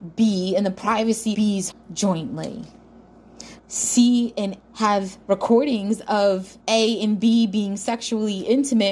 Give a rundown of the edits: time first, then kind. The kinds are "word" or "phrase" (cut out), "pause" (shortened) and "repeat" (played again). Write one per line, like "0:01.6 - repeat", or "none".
0:01.3 - word
0:01.7 - word
0:03.6 - phrase
0:04.6 - word
0:05.2 - pause
0:06.6 - pause